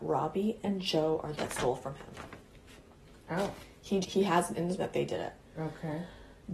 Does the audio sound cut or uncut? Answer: cut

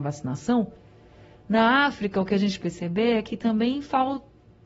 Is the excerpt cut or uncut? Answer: cut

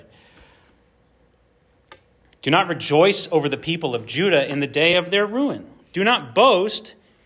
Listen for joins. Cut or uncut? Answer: uncut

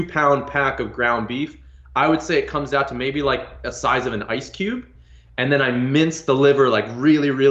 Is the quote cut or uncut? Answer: uncut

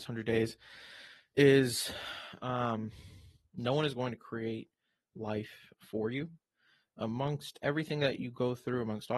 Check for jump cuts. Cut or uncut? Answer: uncut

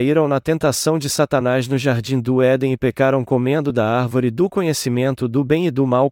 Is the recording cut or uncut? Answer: uncut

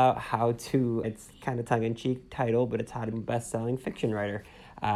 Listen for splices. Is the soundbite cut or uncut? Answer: cut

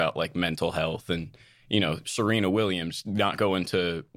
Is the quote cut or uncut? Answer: uncut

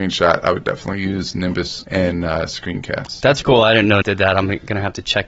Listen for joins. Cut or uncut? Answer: cut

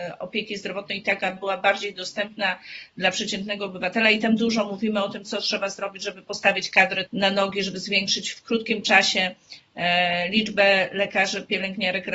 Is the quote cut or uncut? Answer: cut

